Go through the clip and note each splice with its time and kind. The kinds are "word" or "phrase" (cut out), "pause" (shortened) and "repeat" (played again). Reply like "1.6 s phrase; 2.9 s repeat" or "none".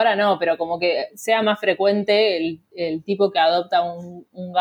none